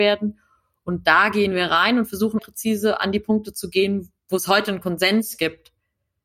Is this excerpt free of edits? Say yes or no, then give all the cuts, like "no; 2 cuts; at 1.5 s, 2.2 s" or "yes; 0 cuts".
no; 2 cuts; at 2.4 s, 4.2 s